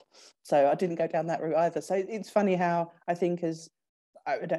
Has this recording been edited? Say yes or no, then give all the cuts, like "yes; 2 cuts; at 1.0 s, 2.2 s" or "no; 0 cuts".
no; 0 cuts